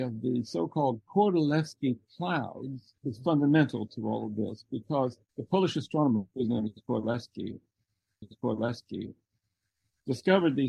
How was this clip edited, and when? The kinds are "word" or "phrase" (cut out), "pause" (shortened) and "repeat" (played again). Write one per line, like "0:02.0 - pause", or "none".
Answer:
0:03.0 - pause
0:05.3 - pause
0:08.2 - repeat